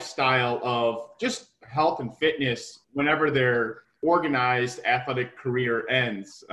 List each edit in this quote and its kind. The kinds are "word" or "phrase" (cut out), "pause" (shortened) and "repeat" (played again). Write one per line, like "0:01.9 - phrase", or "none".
none